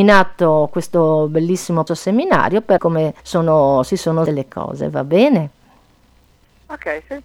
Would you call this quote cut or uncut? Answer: cut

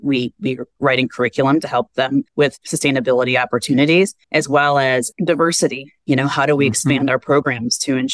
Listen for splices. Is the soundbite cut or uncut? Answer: cut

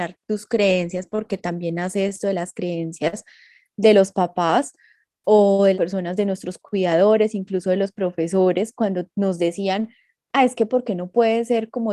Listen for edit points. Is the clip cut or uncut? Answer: cut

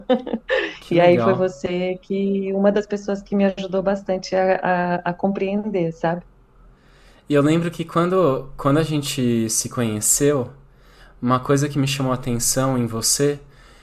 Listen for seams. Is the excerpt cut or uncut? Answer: uncut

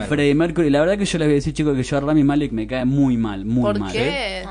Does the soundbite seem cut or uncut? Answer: uncut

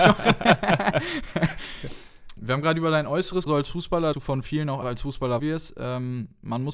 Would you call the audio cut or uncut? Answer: cut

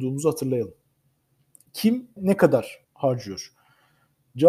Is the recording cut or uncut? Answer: cut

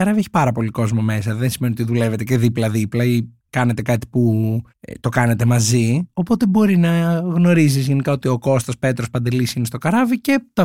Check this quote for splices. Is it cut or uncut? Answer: cut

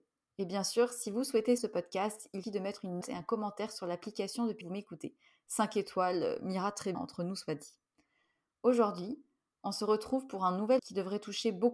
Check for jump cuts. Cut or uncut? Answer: cut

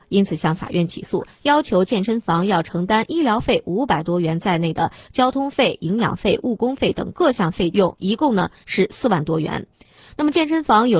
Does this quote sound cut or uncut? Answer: uncut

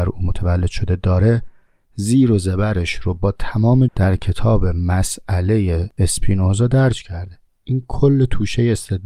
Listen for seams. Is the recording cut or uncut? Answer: cut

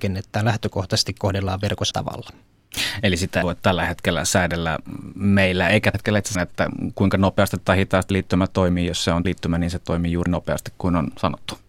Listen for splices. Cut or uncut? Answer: cut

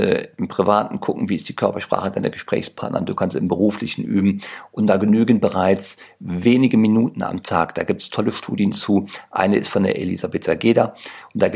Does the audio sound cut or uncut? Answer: uncut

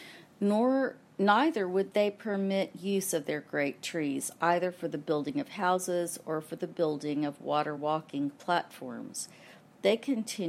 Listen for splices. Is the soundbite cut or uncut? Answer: uncut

